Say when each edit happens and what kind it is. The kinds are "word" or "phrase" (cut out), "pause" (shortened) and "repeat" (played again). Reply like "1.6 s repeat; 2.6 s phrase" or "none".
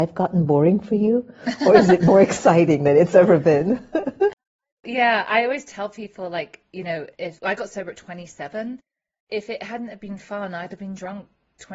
none